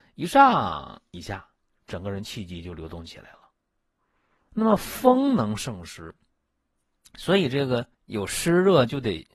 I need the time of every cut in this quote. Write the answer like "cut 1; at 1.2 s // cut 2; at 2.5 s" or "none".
cut 1; at 7.9 s